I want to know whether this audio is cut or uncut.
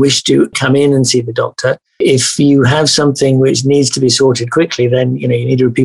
uncut